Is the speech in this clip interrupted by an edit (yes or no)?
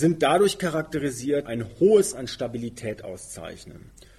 yes